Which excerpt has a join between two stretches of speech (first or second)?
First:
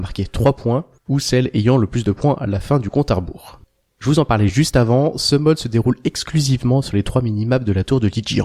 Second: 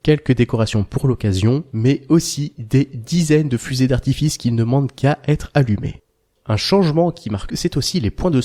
second